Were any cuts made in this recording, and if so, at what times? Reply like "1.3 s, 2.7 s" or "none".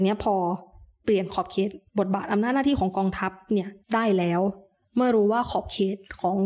1.9 s, 3.8 s